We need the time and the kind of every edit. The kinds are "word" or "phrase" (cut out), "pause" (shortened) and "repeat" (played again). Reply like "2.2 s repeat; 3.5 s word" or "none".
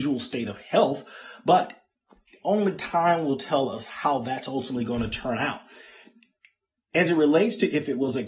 none